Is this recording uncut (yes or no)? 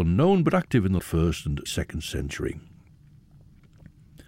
no